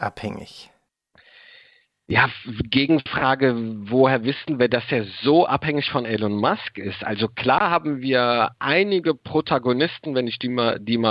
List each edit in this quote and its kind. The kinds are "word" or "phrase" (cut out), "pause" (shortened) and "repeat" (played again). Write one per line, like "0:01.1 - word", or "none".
none